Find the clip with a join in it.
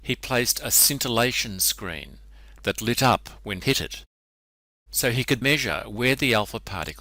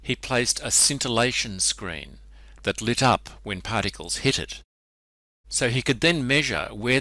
first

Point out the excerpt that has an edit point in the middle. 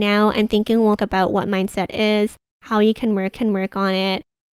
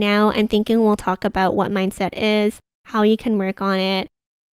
first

